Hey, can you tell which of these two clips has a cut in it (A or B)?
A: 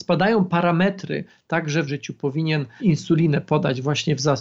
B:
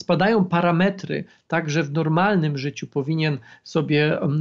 A